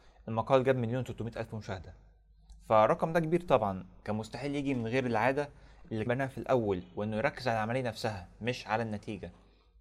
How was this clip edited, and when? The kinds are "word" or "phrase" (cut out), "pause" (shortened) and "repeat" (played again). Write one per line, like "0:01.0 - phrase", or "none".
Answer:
0:06.1 - word